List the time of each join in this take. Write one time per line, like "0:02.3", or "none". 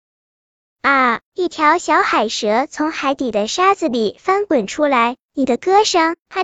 0:01.2
0:05.2